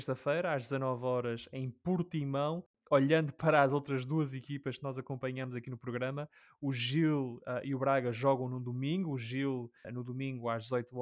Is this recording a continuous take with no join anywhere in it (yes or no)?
no